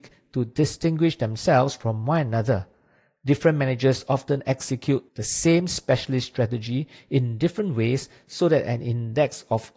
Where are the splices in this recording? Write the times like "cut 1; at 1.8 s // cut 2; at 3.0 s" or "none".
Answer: cut 1; at 5.1 s